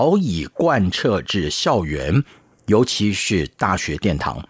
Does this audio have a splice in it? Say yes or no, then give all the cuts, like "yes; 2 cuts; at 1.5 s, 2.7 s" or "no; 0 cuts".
no; 0 cuts